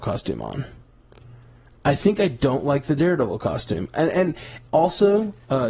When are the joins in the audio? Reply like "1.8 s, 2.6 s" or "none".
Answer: none